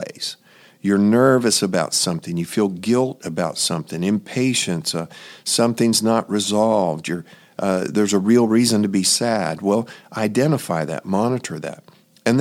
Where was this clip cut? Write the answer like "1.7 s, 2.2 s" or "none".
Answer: none